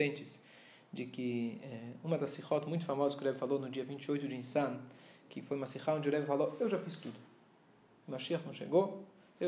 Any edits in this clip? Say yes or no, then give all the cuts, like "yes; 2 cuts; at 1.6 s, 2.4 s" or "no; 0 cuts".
no; 0 cuts